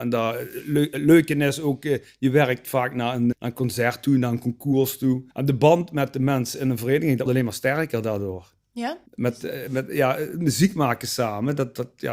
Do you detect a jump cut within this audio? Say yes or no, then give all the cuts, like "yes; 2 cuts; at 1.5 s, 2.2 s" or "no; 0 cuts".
yes; 4 cuts; at 3.3 s, 5.3 s, 7.3 s, 9.1 s